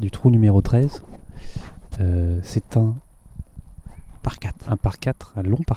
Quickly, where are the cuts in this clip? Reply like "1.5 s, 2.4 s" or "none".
none